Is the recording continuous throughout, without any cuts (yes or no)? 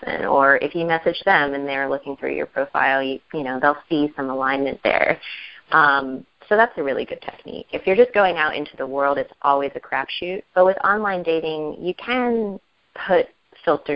no